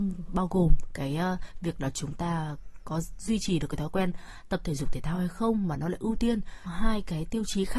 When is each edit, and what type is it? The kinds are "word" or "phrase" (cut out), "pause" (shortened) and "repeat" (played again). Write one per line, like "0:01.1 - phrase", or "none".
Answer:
0:06.7 - word